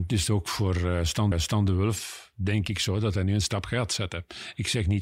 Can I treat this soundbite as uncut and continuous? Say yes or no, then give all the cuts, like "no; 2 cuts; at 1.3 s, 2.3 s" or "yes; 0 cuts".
no; 1 cut; at 1.3 s